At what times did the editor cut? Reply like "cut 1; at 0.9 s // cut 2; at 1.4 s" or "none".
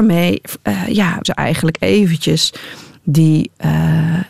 cut 1; at 1.2 s